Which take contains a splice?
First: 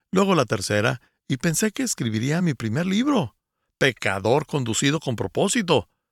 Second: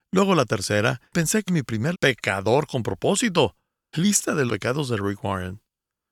second; 6 cuts; at 1.1 s, 1.5 s, 1.9 s, 2.7 s, 3.9 s, 4.5 s

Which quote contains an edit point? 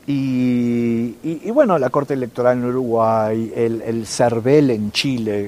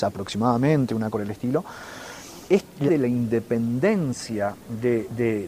second; 3 cuts; at 1.1 s, 2.5 s, 2.9 s

